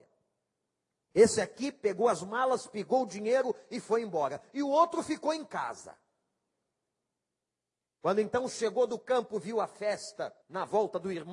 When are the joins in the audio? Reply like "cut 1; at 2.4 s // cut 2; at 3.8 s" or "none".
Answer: cut 1; at 10.4 s